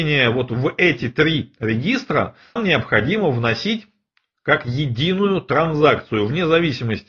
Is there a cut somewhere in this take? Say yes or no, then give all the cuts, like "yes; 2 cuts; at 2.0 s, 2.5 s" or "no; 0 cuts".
yes; 1 cut; at 2.6 s